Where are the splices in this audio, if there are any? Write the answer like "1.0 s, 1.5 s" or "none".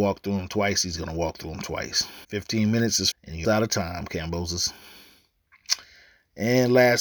2.2 s, 3.1 s, 3.4 s